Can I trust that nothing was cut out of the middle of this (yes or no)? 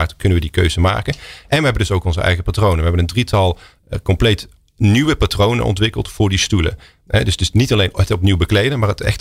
yes